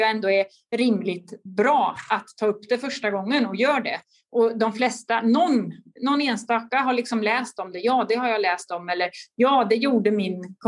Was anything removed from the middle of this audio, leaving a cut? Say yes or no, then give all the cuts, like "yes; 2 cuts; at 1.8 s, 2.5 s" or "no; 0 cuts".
no; 0 cuts